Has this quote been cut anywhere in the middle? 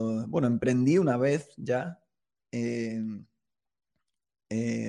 no; 0 cuts

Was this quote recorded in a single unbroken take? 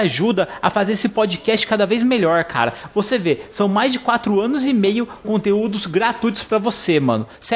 no; 1 cut; at 5.2 s

